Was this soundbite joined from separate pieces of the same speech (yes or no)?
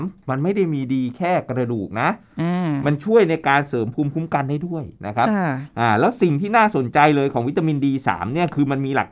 yes